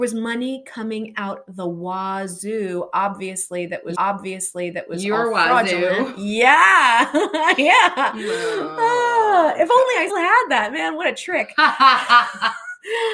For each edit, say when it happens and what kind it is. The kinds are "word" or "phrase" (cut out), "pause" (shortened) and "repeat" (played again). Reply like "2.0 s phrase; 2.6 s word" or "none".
3.9 s repeat; 10.1 s word